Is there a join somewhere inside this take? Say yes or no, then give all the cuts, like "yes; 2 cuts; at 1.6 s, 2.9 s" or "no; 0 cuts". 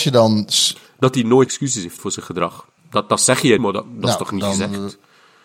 yes; 4 cuts; at 1.5 s, 2.0 s, 2.8 s, 3.6 s